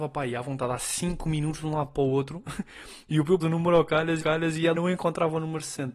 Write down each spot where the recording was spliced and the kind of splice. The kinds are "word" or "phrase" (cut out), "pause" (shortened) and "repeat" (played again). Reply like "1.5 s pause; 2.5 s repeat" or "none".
3.4 s word; 4.2 s repeat; 4.7 s word